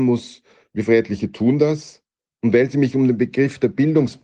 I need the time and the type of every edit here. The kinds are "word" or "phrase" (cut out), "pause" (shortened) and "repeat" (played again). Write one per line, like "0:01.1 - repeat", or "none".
none